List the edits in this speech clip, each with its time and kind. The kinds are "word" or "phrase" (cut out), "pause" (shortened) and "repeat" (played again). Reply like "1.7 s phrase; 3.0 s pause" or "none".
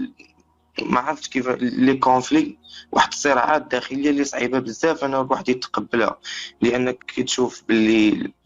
7.0 s word